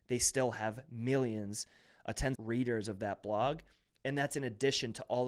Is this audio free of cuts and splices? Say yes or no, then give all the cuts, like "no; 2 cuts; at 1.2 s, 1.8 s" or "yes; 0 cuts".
no; 1 cut; at 2.3 s